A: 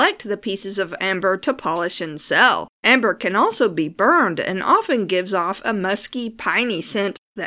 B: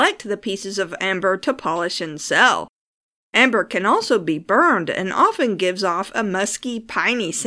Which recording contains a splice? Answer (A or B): A